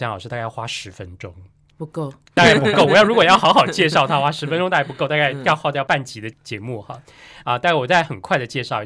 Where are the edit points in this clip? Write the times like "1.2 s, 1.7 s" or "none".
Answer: 2.4 s